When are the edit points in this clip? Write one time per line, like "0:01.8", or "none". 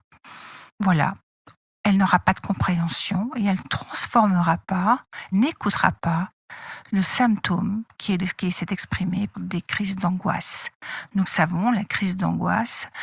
0:03.6
0:05.3
0:08.2
0:09.3